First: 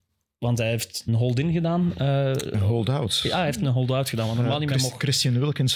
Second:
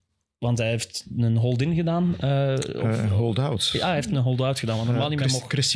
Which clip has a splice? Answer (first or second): first